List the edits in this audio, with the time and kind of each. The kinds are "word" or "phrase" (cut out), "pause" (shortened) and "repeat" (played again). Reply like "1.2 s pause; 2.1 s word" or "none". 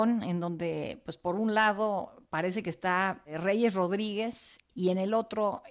none